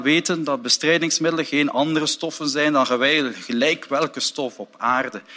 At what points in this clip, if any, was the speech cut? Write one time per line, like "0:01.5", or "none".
none